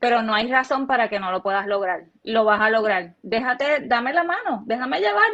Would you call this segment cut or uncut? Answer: uncut